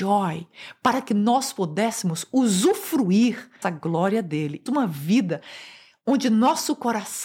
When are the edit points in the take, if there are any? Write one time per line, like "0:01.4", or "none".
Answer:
0:03.6
0:04.7